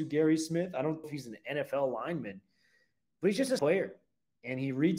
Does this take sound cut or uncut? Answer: cut